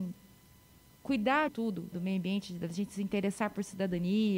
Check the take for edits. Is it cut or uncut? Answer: cut